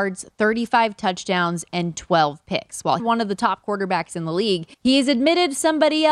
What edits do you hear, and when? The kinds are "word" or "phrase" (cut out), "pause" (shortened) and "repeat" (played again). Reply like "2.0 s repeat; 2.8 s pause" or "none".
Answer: 3.0 s phrase; 4.7 s pause